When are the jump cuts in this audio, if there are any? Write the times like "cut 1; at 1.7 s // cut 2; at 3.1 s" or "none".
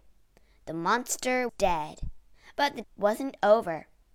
cut 1; at 1.5 s // cut 2; at 2.3 s // cut 3; at 2.8 s